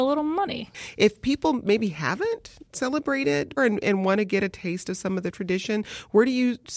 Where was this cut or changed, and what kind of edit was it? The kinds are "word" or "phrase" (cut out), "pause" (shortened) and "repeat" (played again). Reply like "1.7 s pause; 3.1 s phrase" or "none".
3.6 s word